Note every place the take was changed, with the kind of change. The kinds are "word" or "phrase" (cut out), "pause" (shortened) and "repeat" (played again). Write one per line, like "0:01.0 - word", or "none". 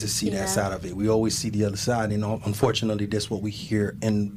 none

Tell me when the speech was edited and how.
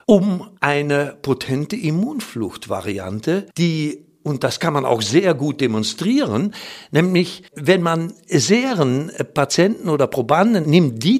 0:03.5 - pause
0:07.5 - pause

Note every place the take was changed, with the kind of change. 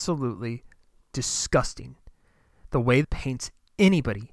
0:03.0 - word

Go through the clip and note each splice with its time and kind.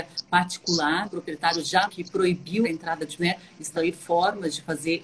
0:01.0 - word
0:01.9 - word
0:02.6 - word
0:03.2 - word
0:03.7 - word

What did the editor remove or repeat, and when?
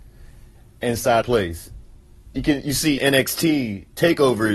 0:01.2 - phrase
0:03.0 - word

